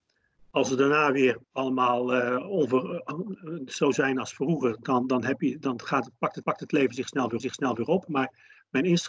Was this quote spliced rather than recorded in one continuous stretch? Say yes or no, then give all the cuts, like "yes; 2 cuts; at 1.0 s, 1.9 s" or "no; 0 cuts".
yes; 4 cuts; at 1.4 s, 3.4 s, 6.4 s, 7.4 s